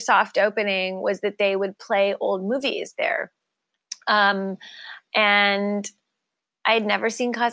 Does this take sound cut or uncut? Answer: uncut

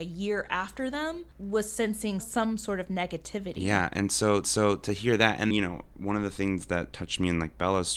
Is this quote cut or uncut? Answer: cut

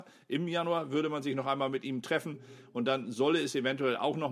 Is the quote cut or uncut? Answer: uncut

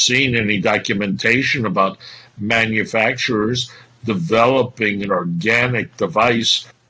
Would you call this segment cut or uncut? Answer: uncut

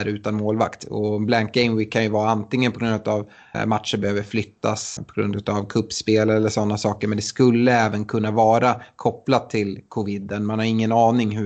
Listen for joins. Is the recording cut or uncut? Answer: cut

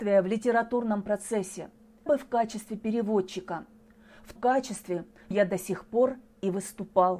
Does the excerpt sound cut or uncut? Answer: cut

